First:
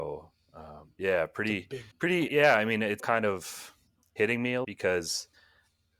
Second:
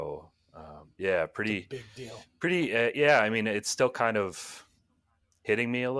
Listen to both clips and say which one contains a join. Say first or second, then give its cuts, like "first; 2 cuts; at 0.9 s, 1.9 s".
first; 5 cuts; at 1.9 s, 2.3 s, 3.0 s, 4.0 s, 4.6 s